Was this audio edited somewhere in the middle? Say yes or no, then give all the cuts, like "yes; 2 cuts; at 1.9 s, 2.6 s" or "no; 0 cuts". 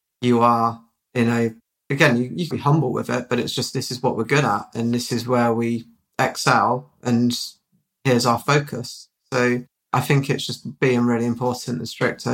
yes; 1 cut; at 2.5 s